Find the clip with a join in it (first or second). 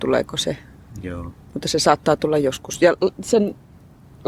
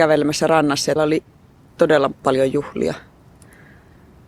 second